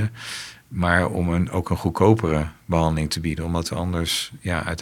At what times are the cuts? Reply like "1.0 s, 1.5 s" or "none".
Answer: none